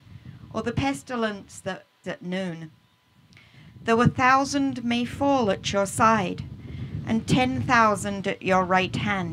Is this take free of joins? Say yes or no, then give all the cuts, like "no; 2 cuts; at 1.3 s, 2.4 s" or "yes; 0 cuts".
no; 1 cut; at 2.0 s